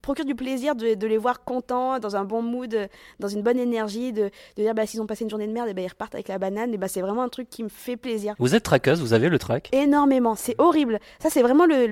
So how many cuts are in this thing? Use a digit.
0